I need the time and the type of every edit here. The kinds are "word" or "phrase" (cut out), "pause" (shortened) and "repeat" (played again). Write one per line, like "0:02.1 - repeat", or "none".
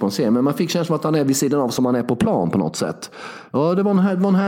none